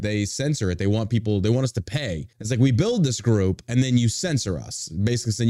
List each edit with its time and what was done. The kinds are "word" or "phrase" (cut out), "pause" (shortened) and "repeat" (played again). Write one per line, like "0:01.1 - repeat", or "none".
0:02.3 - pause